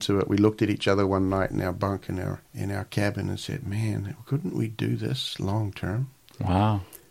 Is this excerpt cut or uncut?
cut